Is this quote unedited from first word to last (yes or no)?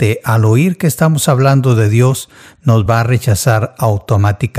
yes